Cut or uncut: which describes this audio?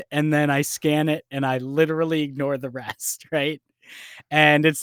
uncut